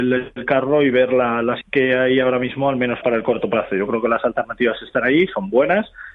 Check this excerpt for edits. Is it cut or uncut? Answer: cut